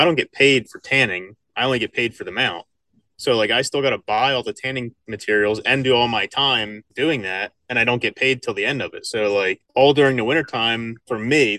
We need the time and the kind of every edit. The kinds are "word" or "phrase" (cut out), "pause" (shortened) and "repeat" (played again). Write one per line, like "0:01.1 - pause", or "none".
0:06.9 - pause
0:09.7 - pause